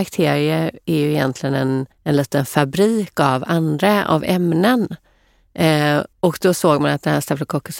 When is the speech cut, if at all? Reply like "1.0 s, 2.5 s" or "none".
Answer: 1.9 s, 6.1 s